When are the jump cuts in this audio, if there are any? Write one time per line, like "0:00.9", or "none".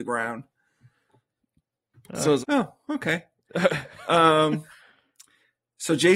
0:02.4